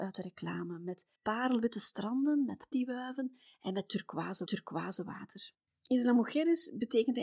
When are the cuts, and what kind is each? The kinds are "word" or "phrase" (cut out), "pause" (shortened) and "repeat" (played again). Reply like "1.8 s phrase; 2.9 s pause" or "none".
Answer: 1.2 s pause; 2.7 s word; 4.5 s repeat